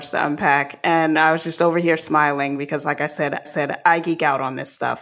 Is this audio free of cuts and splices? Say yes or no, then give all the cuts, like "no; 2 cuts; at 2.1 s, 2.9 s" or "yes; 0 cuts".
no; 1 cut; at 3.5 s